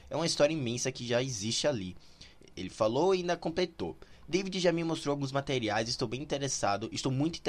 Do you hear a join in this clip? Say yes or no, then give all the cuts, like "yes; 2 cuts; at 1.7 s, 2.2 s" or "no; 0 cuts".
no; 0 cuts